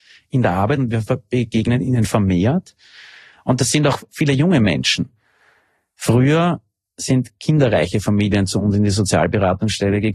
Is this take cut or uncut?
uncut